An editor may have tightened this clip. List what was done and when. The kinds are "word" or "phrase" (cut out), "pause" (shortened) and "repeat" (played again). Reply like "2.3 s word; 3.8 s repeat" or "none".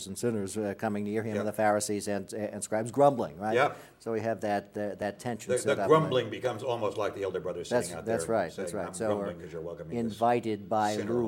none